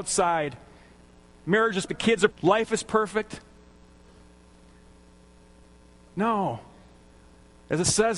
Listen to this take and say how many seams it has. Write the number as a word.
two